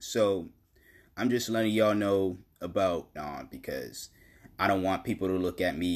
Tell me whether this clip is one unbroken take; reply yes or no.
no